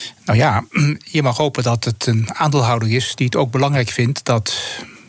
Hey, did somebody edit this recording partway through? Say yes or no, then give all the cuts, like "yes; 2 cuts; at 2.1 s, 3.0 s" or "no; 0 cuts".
no; 0 cuts